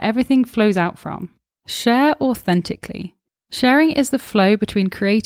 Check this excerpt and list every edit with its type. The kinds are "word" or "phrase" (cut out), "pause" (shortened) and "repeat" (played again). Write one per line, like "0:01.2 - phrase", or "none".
0:01.4 - pause
0:03.3 - pause